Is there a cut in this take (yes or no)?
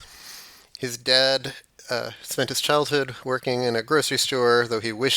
no